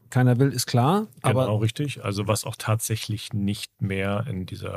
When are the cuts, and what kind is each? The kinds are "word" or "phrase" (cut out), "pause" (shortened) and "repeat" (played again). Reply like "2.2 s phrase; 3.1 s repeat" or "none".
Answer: none